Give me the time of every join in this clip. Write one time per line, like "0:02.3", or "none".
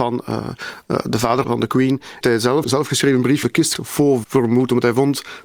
0:01.4
0:02.2
0:02.6
0:03.4
0:03.7
0:04.2